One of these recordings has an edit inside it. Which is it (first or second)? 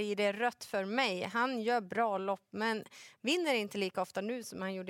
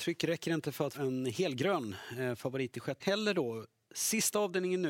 second